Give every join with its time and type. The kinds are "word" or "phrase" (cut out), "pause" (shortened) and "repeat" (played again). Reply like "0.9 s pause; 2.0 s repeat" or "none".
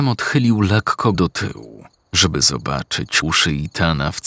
1.1 s word; 1.9 s pause; 3.2 s word